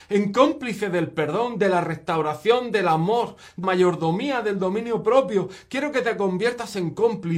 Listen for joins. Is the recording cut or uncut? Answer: cut